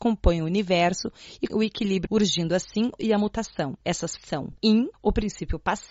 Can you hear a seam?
yes; 5 cuts; at 1.5 s, 2.1 s, 3.0 s, 4.2 s, 4.9 s

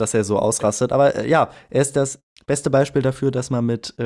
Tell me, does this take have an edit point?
no; 0 cuts

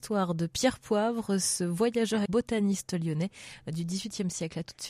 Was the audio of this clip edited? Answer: yes; 1 cut; at 2.3 s

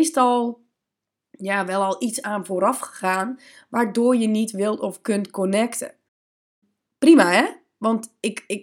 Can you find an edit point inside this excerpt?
no; 0 cuts

